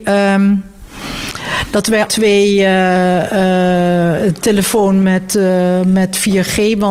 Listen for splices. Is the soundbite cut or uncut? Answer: cut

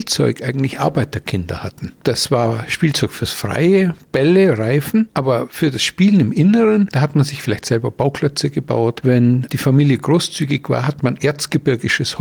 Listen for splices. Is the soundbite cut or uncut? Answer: uncut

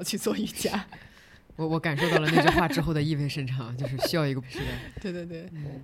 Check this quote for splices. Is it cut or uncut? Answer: cut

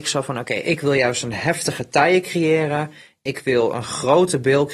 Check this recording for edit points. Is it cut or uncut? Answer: uncut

